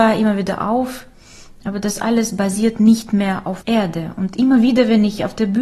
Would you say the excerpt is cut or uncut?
cut